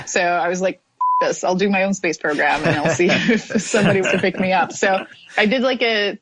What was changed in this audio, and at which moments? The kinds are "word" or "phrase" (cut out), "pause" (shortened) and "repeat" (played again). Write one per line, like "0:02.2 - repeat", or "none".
0:04.0 - word